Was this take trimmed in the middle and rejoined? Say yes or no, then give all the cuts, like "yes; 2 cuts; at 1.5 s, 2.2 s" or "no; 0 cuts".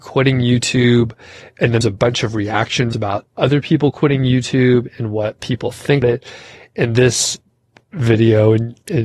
yes; 3 cuts; at 1.8 s, 2.9 s, 6.0 s